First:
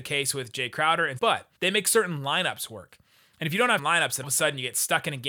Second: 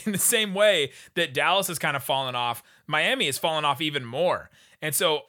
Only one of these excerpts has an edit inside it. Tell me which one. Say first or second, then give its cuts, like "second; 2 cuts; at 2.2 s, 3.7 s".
first; 4 cuts; at 1.2 s, 1.6 s, 3.8 s, 4.2 s